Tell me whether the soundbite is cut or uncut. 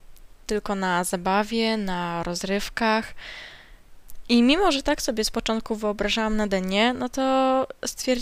uncut